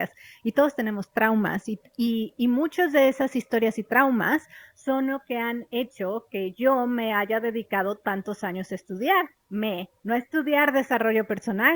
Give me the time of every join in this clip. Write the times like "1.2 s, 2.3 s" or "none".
10.0 s